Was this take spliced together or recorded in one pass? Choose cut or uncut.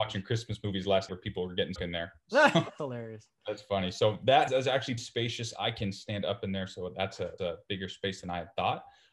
cut